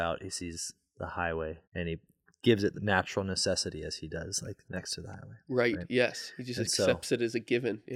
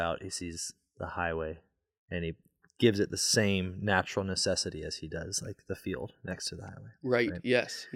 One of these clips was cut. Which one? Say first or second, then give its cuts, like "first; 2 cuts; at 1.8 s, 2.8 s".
first; 3 cuts; at 1.6 s, 2.7 s, 4.6 s